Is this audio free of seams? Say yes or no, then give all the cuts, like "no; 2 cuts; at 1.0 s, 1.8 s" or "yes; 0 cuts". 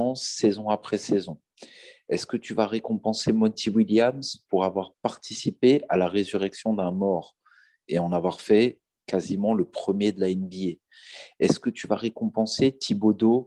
yes; 0 cuts